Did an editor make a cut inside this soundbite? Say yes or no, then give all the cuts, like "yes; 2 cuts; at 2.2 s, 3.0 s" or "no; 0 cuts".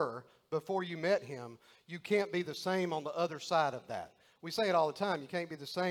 no; 0 cuts